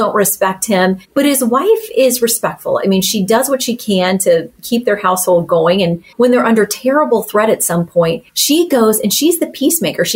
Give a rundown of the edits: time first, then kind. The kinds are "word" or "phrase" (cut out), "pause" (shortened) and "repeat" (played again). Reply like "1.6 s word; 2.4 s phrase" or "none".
1.0 s pause; 6.1 s pause; 8.3 s pause